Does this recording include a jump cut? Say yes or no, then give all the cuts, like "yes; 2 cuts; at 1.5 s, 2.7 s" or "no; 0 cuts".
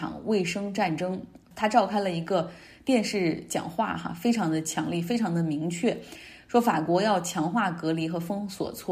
no; 0 cuts